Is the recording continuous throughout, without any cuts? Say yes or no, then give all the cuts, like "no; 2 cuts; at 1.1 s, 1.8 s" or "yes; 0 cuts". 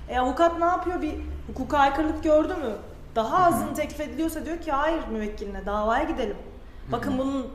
yes; 0 cuts